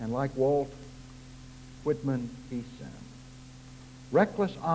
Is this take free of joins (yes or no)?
no